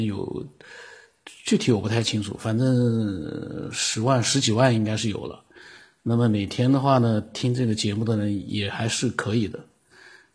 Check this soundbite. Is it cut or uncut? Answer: uncut